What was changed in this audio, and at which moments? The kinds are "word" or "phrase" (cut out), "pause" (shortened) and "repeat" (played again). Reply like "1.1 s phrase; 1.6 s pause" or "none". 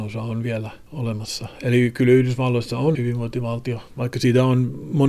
2.9 s word